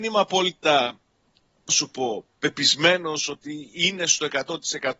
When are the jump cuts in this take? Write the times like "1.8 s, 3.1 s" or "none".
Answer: 1.7 s, 2.3 s